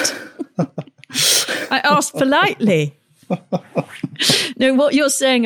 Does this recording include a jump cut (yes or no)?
no